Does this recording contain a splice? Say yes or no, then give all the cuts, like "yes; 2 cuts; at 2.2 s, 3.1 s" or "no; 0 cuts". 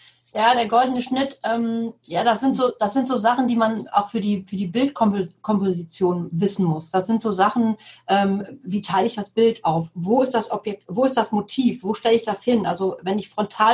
no; 0 cuts